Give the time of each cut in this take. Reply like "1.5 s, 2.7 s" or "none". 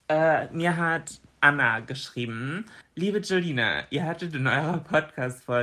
2.8 s